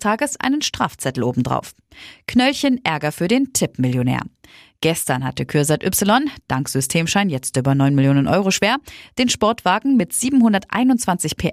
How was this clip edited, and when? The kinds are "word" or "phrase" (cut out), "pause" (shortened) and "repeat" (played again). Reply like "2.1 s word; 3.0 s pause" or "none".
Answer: none